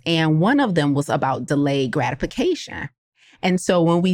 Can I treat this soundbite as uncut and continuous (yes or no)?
yes